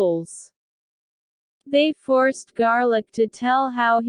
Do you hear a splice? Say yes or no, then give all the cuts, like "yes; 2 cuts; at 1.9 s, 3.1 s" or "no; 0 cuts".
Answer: no; 0 cuts